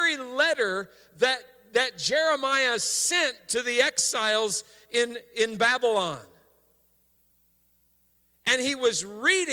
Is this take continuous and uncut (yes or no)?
yes